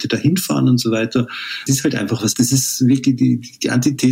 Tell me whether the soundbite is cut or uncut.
cut